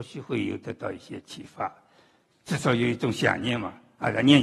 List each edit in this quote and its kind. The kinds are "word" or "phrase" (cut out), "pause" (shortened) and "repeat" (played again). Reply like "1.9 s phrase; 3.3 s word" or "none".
none